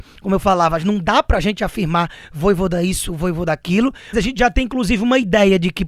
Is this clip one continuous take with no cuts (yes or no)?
no